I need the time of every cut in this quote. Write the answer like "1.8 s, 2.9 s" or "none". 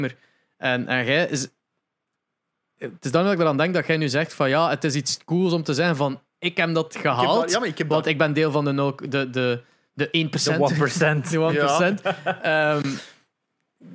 none